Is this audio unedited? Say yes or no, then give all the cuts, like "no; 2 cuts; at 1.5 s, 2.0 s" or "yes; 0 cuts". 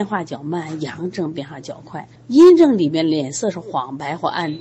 no; 1 cut; at 2.1 s